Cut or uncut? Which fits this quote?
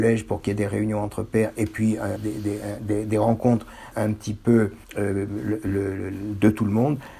cut